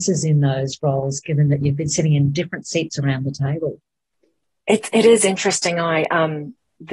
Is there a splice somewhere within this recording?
no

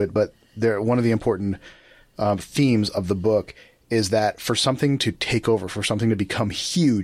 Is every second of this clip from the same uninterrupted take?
yes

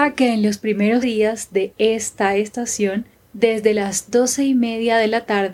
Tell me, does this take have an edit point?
yes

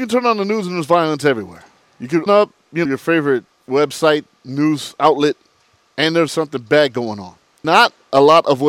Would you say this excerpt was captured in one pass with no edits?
no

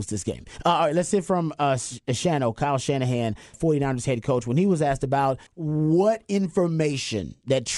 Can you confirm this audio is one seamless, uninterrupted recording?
no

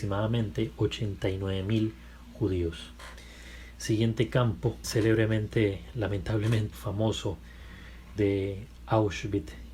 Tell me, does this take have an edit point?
yes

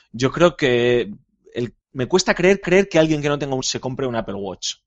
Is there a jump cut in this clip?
yes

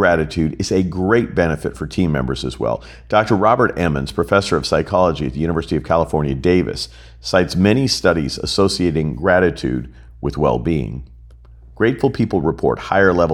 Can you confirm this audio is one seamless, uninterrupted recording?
yes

